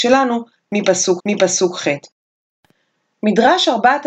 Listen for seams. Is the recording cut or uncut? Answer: cut